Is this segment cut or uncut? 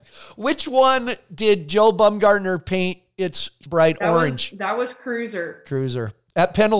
cut